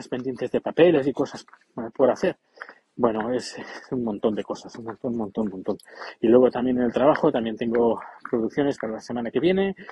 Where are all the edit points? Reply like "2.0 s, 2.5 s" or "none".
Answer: none